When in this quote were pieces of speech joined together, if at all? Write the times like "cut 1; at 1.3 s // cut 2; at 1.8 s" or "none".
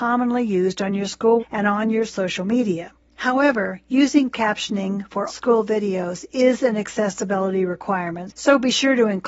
cut 1; at 1.4 s // cut 2; at 2.1 s // cut 3; at 4.3 s // cut 4; at 5.3 s